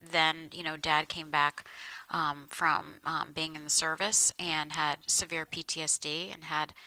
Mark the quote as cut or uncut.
uncut